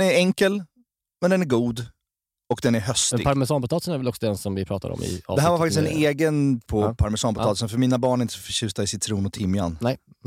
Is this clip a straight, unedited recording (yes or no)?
no